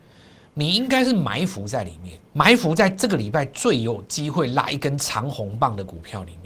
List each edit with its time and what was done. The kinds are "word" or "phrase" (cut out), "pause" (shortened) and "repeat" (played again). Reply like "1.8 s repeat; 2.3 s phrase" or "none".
2.3 s pause